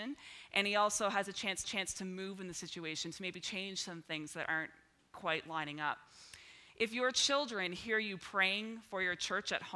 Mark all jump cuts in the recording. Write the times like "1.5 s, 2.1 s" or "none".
1.6 s

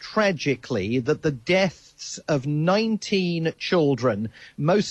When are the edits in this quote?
none

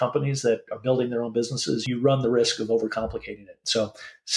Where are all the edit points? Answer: none

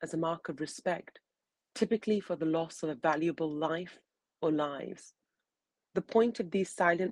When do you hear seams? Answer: none

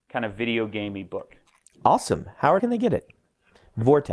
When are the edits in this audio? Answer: 2.6 s

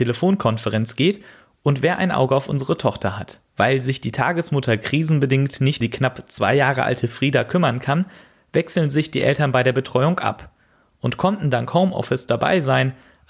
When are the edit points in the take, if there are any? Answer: 3.5 s, 5.8 s

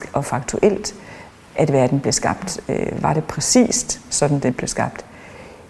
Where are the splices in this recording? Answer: none

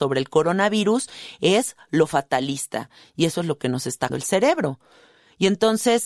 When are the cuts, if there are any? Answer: 4.1 s

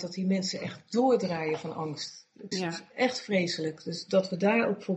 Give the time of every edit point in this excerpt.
2.5 s

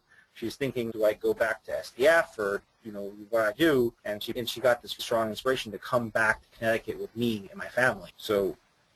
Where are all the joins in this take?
0.9 s, 4.0 s, 4.3 s, 5.0 s

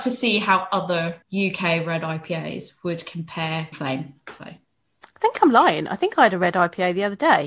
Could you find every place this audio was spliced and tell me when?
1.2 s, 3.7 s

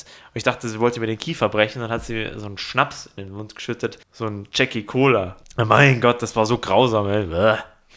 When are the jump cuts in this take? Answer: 4.0 s

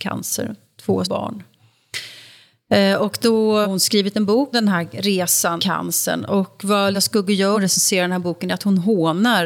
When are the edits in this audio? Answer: 1.0 s, 3.6 s, 4.5 s, 5.6 s, 6.9 s, 7.5 s

